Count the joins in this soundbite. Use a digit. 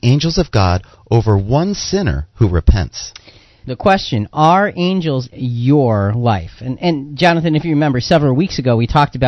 2